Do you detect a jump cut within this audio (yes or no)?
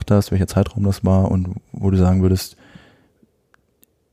no